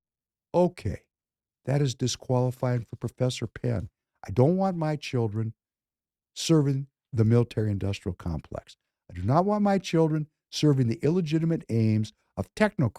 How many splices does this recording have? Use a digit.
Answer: 0